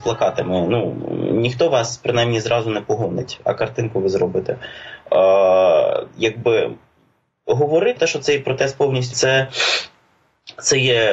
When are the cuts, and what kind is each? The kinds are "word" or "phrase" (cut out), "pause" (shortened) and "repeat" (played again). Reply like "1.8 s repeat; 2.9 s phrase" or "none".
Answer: 8.0 s word; 9.1 s phrase